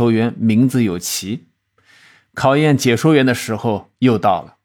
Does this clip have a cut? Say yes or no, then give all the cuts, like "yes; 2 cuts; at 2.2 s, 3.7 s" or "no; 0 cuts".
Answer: no; 0 cuts